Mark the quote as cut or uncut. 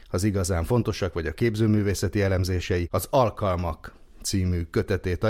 uncut